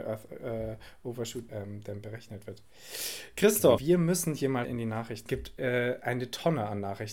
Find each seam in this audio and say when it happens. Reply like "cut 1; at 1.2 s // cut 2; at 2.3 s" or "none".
cut 1; at 1.5 s // cut 2; at 3.8 s // cut 3; at 4.6 s // cut 4; at 5.3 s